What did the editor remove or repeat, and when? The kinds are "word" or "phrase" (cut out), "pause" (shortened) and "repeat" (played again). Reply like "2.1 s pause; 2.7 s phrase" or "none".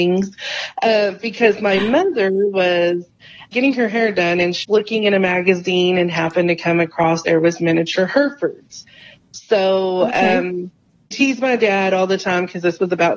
3.5 s word; 4.6 s word; 7.2 s word; 11.1 s word